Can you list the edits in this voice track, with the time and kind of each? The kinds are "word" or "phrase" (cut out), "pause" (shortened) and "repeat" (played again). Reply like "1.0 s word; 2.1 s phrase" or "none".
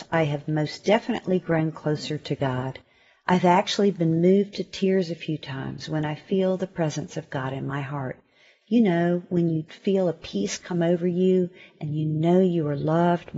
9.7 s word